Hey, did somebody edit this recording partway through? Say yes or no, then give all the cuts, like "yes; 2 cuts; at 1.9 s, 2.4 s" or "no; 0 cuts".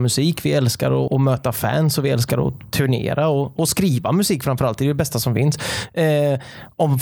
yes; 1 cut; at 1.1 s